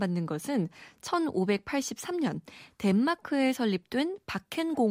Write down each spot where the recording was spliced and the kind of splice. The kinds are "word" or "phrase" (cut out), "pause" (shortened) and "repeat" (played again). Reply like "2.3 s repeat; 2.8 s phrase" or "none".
none